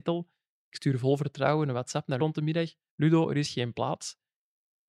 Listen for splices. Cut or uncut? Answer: cut